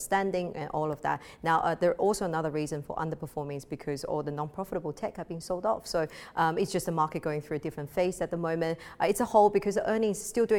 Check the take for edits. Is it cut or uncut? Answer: uncut